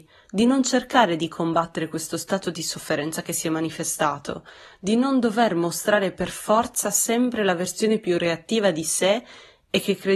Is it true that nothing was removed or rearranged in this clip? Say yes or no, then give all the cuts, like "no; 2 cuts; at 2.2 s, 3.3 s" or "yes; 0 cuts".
yes; 0 cuts